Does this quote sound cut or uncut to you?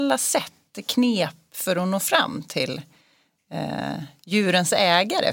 uncut